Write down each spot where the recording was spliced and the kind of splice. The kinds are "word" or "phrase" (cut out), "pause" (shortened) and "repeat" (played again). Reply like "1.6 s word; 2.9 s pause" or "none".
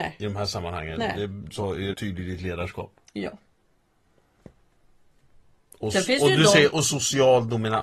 1.5 s word; 1.9 s word